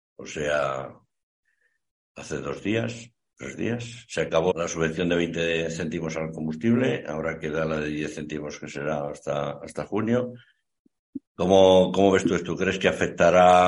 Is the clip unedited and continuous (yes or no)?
no